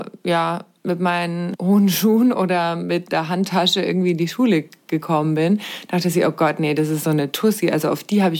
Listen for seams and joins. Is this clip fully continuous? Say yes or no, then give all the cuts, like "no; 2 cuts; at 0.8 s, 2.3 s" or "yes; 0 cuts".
yes; 0 cuts